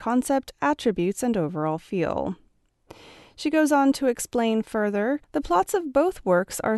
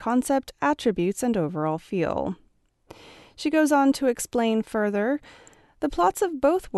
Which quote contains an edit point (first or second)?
first